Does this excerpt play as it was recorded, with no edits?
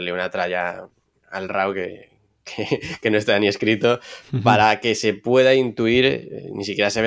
yes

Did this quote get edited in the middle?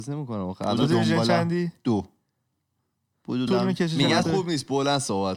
yes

